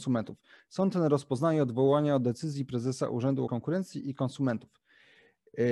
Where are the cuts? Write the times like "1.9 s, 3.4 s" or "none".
3.5 s